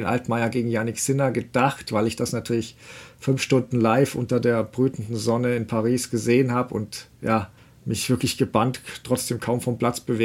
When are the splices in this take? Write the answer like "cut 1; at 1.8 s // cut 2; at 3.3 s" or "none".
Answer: cut 1; at 7.6 s